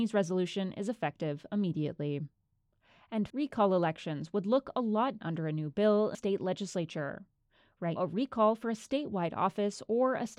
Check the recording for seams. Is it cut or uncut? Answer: cut